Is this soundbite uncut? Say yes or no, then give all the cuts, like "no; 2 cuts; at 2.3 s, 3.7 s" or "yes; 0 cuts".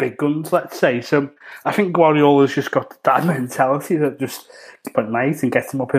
no; 1 cut; at 4.9 s